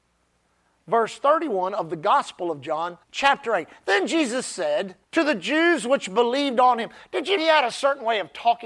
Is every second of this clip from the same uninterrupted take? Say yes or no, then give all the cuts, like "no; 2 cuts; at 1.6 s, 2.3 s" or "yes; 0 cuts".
no; 3 cuts; at 3.0 s, 5.0 s, 7.4 s